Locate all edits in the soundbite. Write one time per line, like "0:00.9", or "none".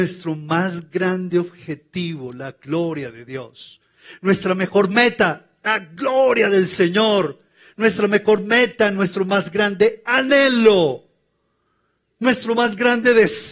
none